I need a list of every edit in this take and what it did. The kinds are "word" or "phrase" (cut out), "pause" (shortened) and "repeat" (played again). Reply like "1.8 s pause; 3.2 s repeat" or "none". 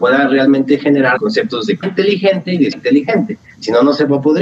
1.2 s word; 1.8 s word; 2.7 s word